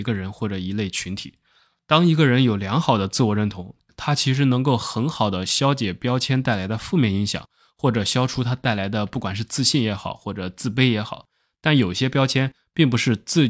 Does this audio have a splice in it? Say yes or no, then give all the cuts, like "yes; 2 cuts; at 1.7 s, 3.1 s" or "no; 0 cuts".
no; 0 cuts